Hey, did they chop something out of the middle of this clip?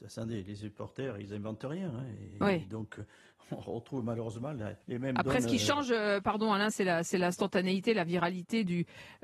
yes; 2 cuts; at 4.8 s, 6.7 s

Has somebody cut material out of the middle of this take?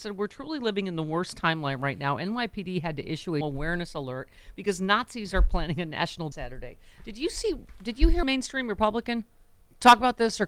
yes; 3 cuts; at 3.4 s, 6.3 s, 8.2 s

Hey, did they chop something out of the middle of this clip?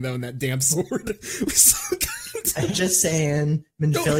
yes; 1 cut; at 2.7 s

